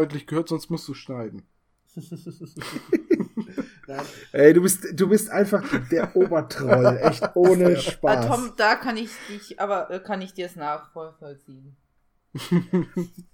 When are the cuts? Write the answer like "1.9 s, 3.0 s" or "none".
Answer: none